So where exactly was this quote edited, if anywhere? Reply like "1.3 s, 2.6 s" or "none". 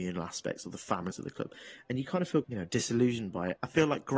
1.1 s, 2.4 s